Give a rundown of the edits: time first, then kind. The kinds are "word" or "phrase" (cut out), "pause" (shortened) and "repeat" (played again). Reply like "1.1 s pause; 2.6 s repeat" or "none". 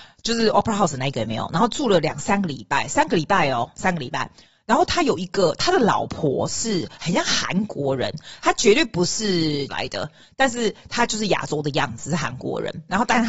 9.7 s word